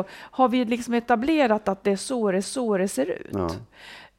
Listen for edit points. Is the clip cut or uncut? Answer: cut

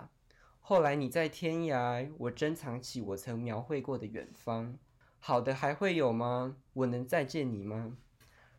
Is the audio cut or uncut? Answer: cut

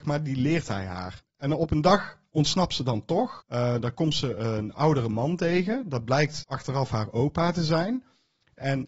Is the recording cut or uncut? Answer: uncut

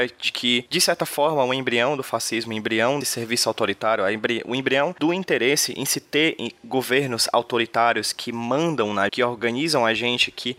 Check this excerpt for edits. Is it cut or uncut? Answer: cut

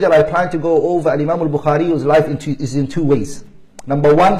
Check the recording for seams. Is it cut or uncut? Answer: uncut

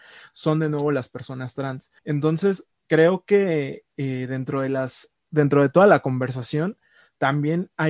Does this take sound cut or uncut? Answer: cut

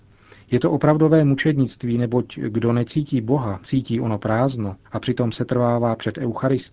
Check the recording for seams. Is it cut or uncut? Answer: cut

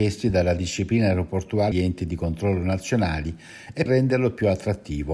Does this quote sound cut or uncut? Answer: cut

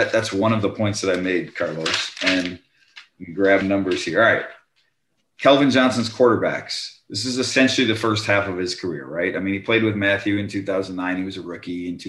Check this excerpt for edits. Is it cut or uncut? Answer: cut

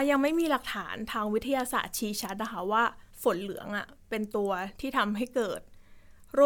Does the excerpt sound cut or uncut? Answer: cut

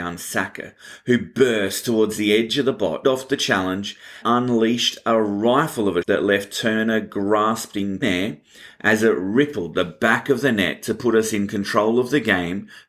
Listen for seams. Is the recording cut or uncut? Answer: cut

